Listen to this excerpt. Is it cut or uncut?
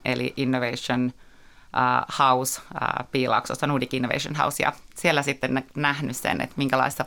uncut